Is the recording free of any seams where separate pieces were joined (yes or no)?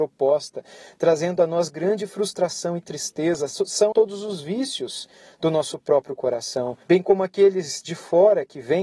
no